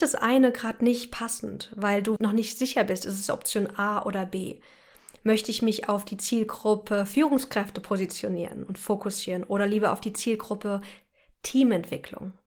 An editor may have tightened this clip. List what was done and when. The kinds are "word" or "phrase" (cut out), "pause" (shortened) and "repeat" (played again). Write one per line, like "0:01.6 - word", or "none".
0:02.2 - word